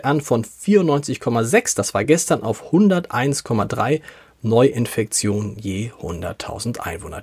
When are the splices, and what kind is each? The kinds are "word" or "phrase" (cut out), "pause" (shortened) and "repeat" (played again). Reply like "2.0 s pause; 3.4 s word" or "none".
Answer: none